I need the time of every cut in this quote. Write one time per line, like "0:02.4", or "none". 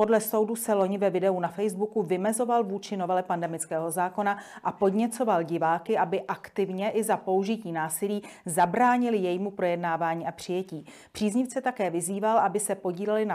none